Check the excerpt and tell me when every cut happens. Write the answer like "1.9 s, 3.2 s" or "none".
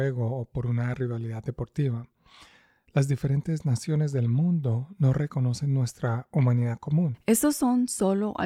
none